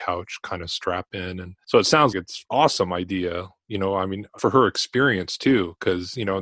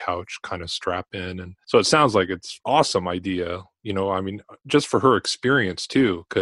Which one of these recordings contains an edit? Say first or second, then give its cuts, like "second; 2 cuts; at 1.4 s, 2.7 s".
first; 2 cuts; at 2.1 s, 4.4 s